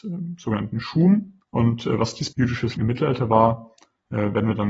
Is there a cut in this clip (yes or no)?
yes